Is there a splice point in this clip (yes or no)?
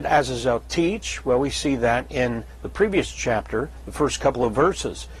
no